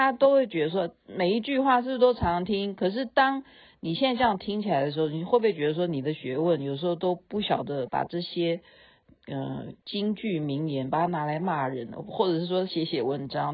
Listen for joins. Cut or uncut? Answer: uncut